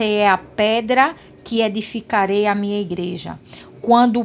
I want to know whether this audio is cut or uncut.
uncut